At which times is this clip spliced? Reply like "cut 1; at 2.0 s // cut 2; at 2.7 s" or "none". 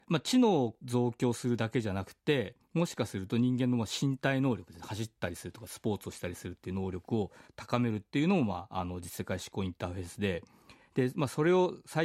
cut 1; at 2.6 s // cut 2; at 7.5 s